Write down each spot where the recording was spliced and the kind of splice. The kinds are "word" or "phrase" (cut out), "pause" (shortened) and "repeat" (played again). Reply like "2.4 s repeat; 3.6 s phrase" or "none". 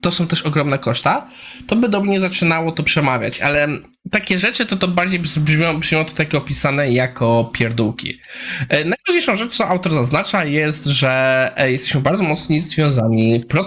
none